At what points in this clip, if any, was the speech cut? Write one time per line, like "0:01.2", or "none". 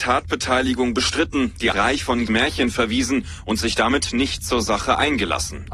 0:01.7
0:02.3